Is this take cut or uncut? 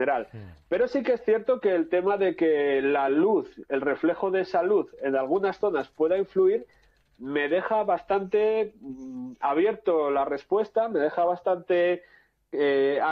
uncut